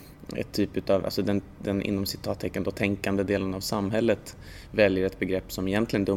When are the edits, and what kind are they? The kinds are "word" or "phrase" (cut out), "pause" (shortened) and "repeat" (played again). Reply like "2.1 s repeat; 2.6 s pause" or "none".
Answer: none

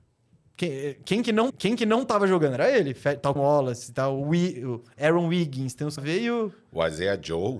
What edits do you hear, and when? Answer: 1.5 s repeat; 3.4 s word; 6.0 s phrase

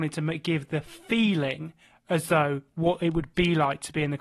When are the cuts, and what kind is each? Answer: none

